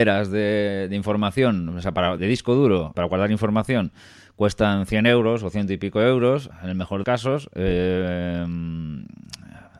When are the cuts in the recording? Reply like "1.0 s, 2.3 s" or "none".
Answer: 2.2 s, 2.9 s, 6.5 s, 7.0 s